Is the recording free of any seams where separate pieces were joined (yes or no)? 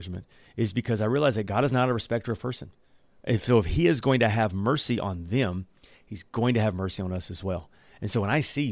yes